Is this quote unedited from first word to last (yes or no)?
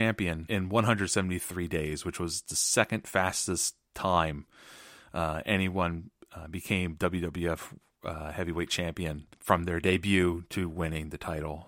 yes